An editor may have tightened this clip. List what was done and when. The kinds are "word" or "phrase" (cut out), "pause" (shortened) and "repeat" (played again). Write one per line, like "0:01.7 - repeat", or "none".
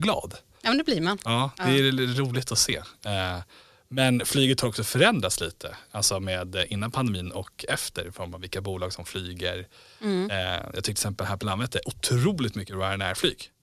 none